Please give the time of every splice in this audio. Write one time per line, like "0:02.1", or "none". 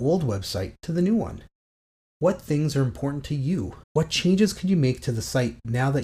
0:03.8